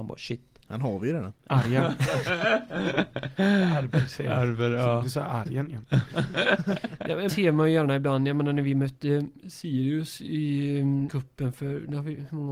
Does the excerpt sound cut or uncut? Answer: cut